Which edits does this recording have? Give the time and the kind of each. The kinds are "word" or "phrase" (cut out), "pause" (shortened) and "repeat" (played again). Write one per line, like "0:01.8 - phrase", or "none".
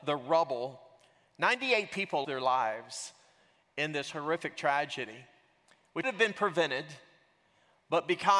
0:02.2 - word
0:06.0 - word

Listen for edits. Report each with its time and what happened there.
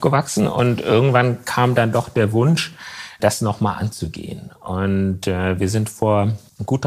none

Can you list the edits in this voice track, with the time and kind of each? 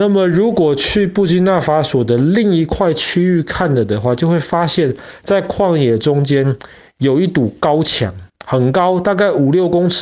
0:06.9 - pause
0:08.3 - pause

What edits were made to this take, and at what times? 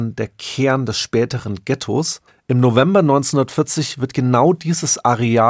0:02.3 - pause

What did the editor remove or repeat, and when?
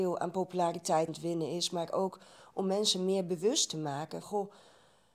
0:01.1 - word
0:04.2 - word

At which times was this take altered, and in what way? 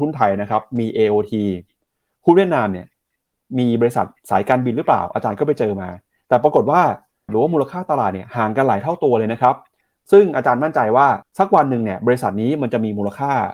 0:07.3 - phrase
0:11.2 - pause

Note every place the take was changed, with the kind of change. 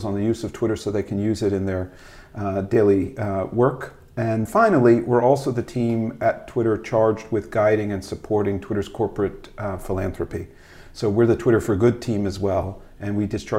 0:04.5 - word

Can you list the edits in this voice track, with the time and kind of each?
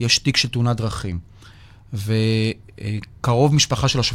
none

